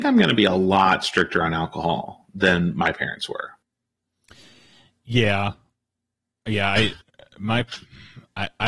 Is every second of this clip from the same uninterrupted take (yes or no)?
yes